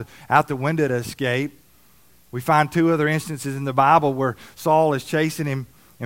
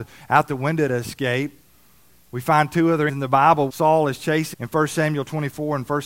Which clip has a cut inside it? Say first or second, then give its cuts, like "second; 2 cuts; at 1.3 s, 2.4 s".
second; 3 cuts; at 3.1 s, 3.7 s, 4.5 s